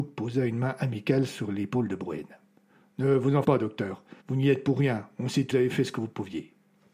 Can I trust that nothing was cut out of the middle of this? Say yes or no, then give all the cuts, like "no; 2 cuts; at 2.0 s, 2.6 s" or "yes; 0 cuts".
no; 3 cuts; at 3.4 s, 4.2 s, 5.5 s